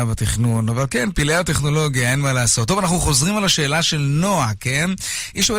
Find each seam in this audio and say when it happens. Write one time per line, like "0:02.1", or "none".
none